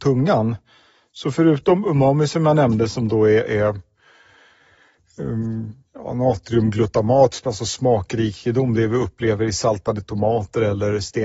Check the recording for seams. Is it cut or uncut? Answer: cut